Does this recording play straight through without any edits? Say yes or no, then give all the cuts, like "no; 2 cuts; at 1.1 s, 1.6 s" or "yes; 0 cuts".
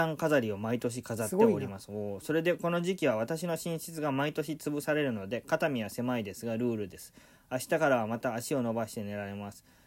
yes; 0 cuts